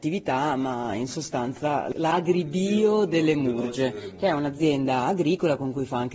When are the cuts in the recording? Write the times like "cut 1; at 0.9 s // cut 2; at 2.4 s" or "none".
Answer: none